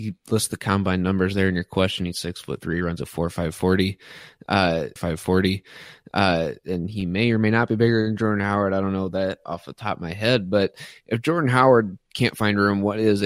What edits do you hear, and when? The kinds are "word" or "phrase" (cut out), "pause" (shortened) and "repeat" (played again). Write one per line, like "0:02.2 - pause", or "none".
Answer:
0:05.0 - repeat

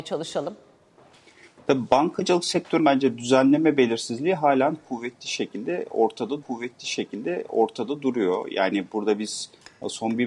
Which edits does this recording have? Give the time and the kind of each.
0:02.8 - word
0:06.4 - repeat

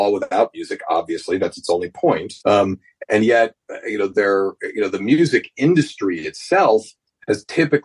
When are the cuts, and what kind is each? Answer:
0:02.4 - pause

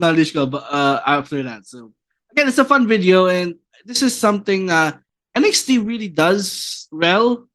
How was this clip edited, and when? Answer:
none

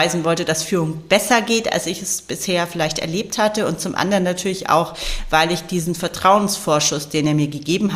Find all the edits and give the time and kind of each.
none

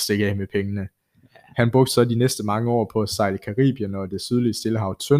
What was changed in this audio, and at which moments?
none

